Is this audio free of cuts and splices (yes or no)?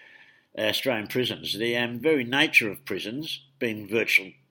yes